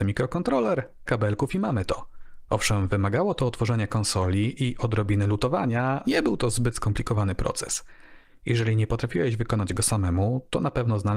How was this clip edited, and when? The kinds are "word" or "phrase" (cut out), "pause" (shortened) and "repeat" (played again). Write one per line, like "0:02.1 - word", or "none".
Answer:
0:01.1 - word
0:06.0 - word